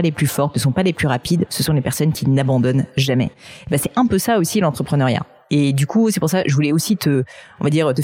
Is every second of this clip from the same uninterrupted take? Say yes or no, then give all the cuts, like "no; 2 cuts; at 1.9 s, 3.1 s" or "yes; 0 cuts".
yes; 0 cuts